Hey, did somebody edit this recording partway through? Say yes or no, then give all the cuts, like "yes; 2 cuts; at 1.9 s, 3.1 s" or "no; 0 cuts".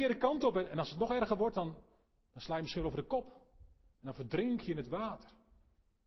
no; 0 cuts